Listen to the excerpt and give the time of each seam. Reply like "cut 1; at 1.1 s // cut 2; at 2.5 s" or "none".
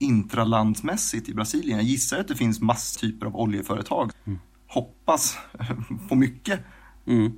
cut 1; at 3.0 s // cut 2; at 4.1 s // cut 3; at 6.1 s